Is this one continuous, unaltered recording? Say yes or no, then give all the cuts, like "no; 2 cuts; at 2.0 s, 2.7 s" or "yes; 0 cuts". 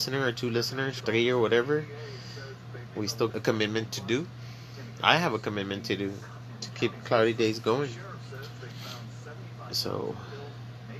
no; 2 cuts; at 1.0 s, 3.3 s